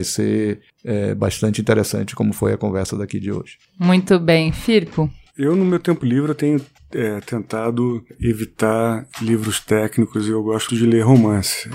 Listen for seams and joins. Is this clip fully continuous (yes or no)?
no